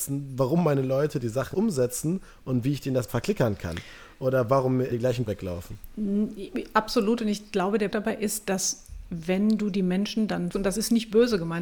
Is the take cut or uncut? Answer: cut